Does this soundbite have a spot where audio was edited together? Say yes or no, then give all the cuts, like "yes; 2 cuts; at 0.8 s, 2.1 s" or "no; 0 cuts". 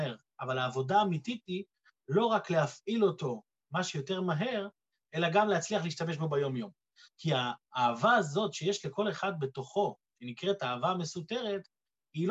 no; 0 cuts